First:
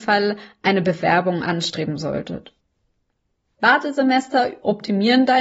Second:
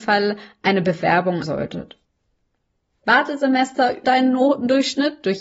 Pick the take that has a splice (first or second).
second